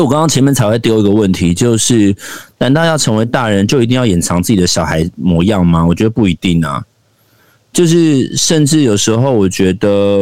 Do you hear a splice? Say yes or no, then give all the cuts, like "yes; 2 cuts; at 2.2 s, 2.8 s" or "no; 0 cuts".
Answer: no; 0 cuts